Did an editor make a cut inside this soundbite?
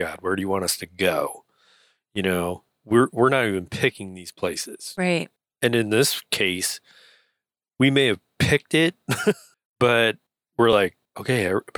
no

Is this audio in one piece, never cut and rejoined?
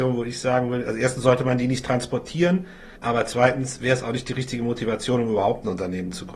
no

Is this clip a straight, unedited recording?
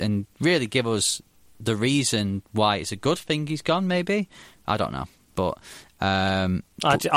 yes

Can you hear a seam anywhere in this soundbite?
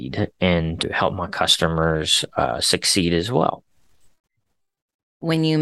no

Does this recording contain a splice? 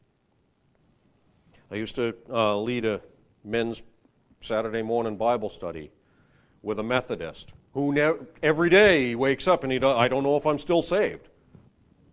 no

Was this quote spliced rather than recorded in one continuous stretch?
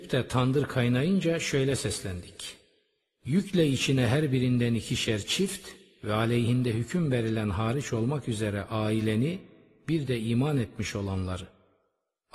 no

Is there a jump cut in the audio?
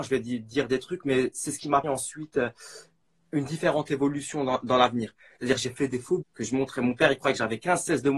yes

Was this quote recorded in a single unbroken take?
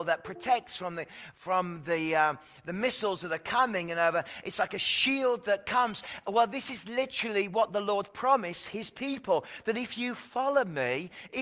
yes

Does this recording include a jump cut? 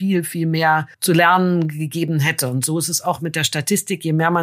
yes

